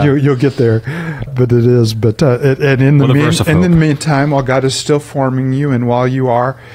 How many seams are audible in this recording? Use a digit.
1